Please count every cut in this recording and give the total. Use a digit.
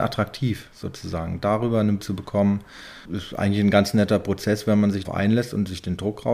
3